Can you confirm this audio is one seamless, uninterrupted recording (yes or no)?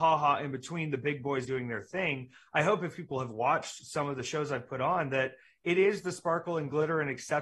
no